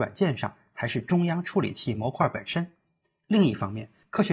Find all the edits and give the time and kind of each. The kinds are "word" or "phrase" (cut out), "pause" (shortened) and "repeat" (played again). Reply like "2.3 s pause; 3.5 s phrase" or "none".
none